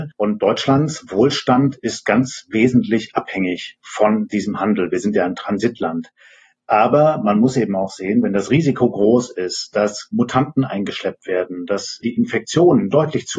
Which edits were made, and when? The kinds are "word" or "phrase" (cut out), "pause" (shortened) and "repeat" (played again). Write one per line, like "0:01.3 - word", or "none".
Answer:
none